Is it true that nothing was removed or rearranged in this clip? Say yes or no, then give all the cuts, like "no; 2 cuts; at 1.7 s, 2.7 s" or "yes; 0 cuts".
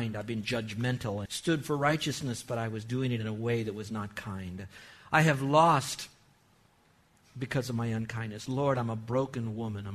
no; 1 cut; at 1.3 s